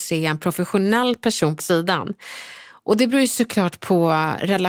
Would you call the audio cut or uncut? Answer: cut